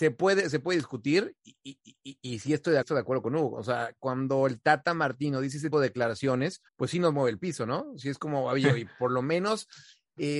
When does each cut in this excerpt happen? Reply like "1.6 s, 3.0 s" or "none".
1.8 s, 2.8 s, 5.7 s, 6.7 s